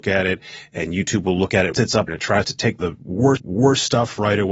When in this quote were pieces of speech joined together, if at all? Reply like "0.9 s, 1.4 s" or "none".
1.7 s, 2.1 s, 2.8 s, 3.4 s